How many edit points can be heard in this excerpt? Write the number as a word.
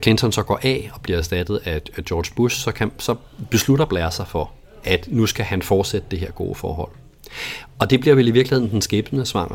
zero